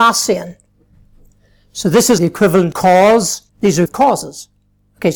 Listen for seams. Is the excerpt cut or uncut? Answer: cut